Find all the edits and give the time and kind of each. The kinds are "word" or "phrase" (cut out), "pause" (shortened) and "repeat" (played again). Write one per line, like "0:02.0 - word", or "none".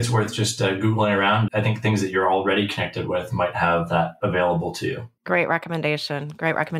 0:01.5 - word
0:05.2 - pause

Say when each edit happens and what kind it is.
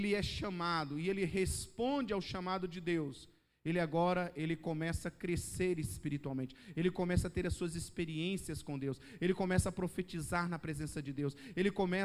none

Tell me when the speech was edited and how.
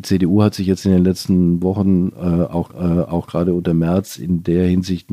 0:02.7 - repeat

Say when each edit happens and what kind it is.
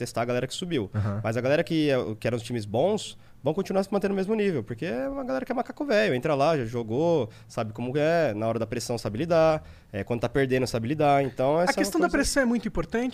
none

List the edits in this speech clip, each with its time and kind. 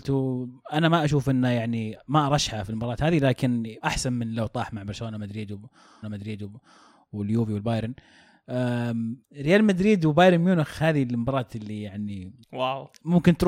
0:03.8 - word
0:06.0 - repeat
0:09.2 - pause
0:12.4 - pause

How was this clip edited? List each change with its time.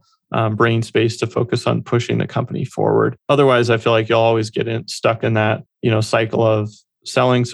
0:03.2 - pause
0:05.7 - pause

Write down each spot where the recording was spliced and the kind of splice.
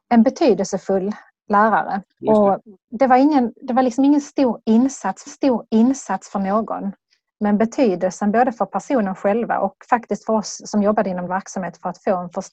0:02.1 - pause
0:05.3 - repeat
0:11.3 - word

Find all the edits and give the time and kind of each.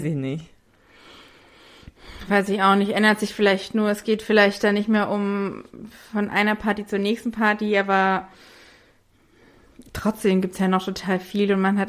none

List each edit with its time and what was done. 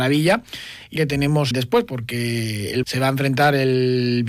0:01.0 - phrase
0:01.5 - word
0:02.8 - word

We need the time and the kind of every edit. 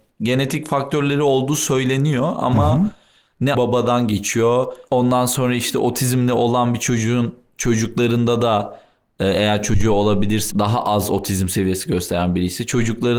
0:03.5 - phrase
0:10.5 - word

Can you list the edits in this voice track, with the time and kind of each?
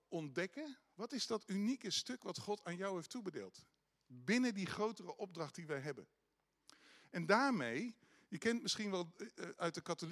none

